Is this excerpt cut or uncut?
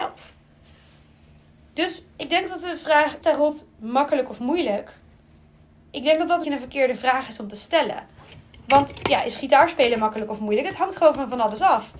cut